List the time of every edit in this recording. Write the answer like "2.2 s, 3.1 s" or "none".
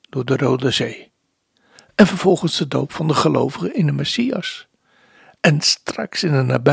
none